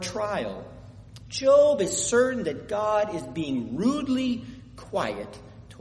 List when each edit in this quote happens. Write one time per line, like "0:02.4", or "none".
none

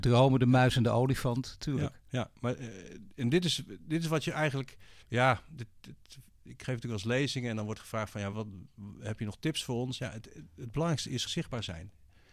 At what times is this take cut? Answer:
0:05.0
0:08.3
0:11.3

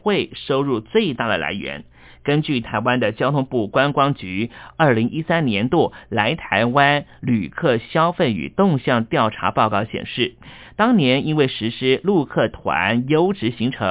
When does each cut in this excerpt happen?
none

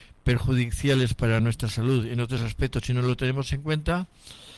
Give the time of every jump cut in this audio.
none

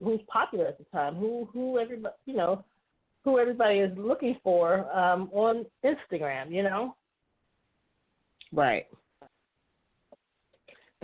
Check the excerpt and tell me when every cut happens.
none

